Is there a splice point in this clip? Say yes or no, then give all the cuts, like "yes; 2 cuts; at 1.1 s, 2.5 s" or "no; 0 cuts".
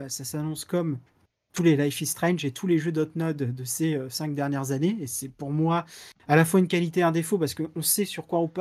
no; 0 cuts